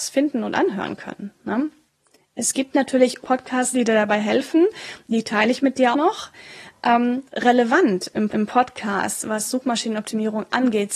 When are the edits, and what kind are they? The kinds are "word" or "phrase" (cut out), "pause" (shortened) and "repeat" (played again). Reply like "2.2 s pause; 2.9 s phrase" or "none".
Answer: 1.9 s pause; 3.2 s phrase; 3.7 s word; 5.9 s word; 7.3 s pause; 8.3 s repeat